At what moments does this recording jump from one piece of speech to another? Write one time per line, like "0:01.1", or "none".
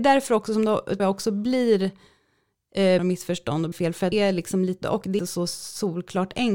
0:01.0
0:03.0
0:03.7
0:04.1
0:04.8
0:05.2